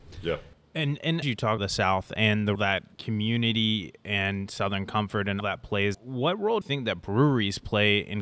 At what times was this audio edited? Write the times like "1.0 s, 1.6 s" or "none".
1.2 s, 1.6 s, 2.6 s, 2.9 s, 5.4 s, 5.9 s, 6.6 s